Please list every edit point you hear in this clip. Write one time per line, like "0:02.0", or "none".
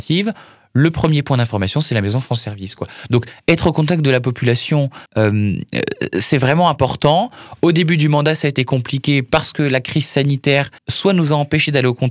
0:05.1
0:10.8